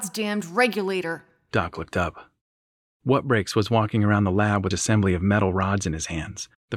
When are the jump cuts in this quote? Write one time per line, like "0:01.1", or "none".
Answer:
0:04.7